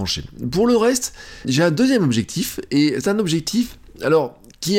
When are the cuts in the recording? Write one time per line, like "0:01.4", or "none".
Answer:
0:01.4
0:03.0